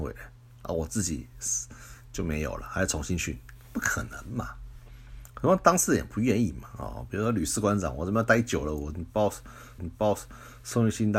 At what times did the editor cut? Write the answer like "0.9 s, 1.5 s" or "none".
9.8 s

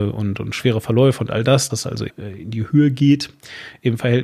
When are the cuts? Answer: 1.7 s, 2.1 s

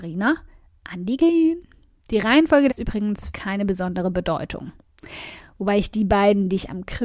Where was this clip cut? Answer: 1.2 s, 2.7 s, 3.3 s

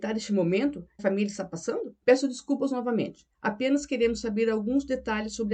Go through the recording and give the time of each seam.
1.0 s, 2.0 s, 3.3 s

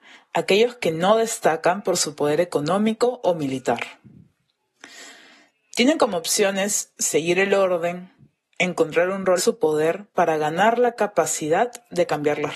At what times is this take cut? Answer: 9.4 s

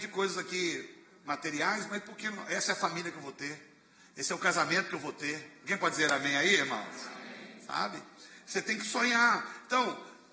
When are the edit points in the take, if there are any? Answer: none

